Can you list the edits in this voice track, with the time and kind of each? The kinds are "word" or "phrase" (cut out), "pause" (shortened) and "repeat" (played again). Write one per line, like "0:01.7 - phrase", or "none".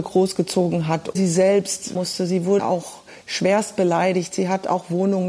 0:01.1 - word
0:01.9 - phrase
0:02.6 - word